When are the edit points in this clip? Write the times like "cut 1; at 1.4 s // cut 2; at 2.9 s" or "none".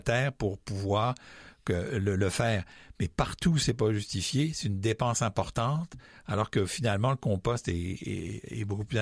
none

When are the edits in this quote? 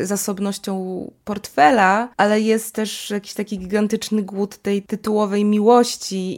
cut 1; at 2.1 s

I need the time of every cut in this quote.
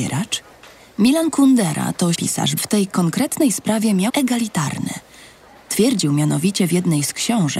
cut 1; at 2.1 s // cut 2; at 2.6 s // cut 3; at 4.1 s

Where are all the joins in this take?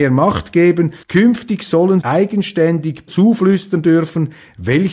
cut 1; at 1.0 s // cut 2; at 2.0 s // cut 3; at 3.1 s

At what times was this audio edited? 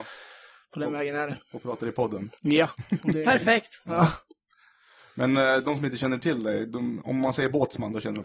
none

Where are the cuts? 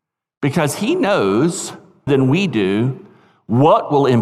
cut 1; at 2.1 s

